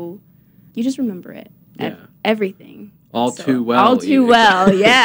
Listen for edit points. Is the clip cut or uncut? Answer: uncut